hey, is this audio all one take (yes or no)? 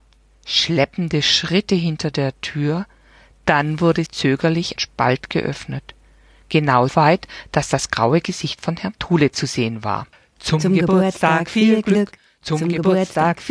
no